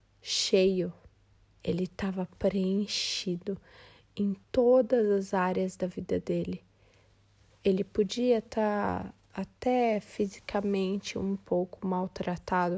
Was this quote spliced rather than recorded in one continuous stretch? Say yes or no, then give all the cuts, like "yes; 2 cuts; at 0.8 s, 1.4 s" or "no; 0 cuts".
yes; 1 cut; at 4.4 s